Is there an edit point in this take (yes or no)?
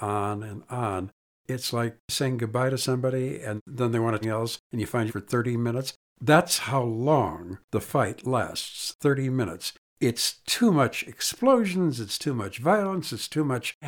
yes